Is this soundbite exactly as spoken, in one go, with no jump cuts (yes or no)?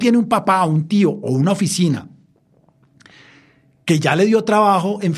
yes